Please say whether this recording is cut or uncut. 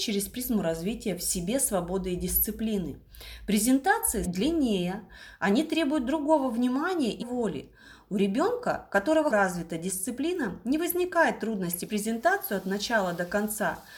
cut